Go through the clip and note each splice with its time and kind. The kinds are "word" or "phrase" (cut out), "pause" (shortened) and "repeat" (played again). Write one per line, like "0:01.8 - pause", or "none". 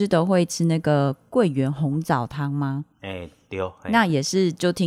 0:02.9 - pause